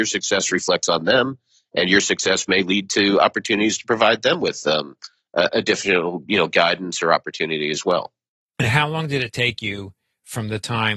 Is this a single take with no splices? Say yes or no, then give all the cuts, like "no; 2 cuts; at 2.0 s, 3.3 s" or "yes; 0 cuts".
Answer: yes; 0 cuts